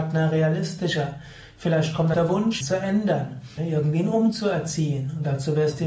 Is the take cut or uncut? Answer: cut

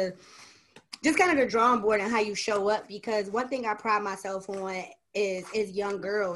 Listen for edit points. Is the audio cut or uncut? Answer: uncut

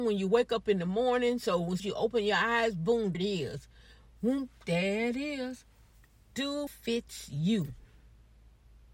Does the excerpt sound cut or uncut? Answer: cut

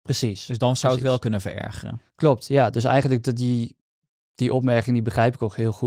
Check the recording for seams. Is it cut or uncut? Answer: uncut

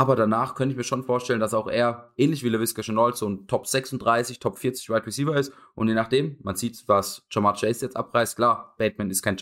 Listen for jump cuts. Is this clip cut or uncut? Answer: uncut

